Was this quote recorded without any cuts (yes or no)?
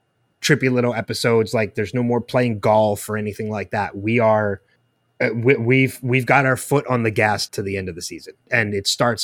no